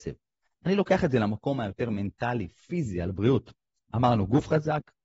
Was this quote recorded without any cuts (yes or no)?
yes